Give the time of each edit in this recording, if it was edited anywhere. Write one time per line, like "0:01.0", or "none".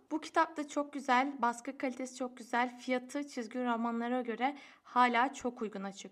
none